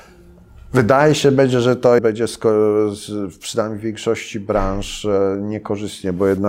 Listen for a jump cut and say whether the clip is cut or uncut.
cut